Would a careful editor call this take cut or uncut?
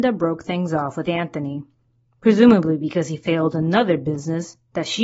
uncut